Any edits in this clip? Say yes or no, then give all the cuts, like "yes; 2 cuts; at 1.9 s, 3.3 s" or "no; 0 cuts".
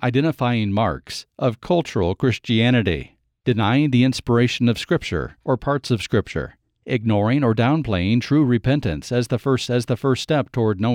yes; 1 cut; at 9.7 s